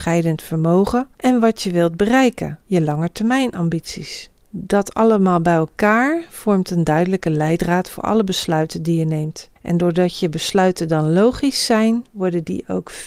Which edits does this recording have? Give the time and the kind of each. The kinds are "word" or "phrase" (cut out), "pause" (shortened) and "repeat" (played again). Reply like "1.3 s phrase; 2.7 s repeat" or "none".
1.1 s pause; 2.6 s pause; 4.4 s pause; 9.6 s pause